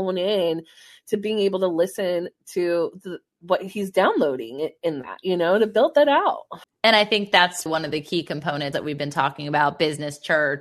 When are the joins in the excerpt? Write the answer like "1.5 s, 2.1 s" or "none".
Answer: 6.6 s, 7.7 s, 8.7 s